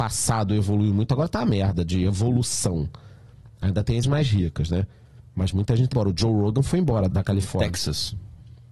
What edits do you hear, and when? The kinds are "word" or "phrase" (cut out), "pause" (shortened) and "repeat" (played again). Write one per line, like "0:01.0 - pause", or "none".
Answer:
0:04.0 - word
0:05.9 - word
0:07.1 - word